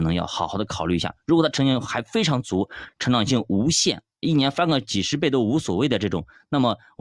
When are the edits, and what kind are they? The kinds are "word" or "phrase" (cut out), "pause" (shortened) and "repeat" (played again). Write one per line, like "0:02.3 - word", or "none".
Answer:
none